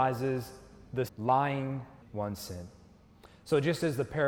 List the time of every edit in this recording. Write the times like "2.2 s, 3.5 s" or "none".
1.1 s, 2.0 s